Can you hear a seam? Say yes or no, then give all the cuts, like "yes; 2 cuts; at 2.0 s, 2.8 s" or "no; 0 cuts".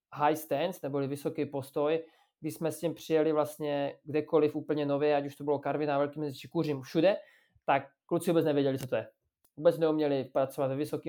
no; 0 cuts